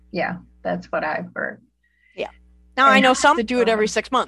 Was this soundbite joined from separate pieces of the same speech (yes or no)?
yes